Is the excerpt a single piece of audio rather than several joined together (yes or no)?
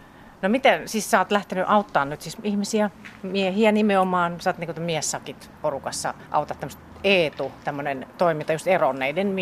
no